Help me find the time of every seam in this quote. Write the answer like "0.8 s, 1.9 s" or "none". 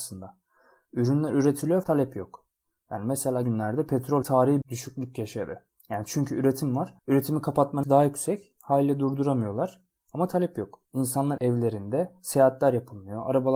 1.8 s, 3.4 s, 4.2 s, 4.6 s, 5.7 s, 7.0 s, 7.8 s, 10.8 s